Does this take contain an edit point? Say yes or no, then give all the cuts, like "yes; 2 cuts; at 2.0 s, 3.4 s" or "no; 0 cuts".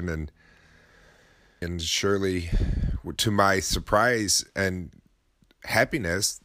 yes; 2 cuts; at 1.6 s, 3.2 s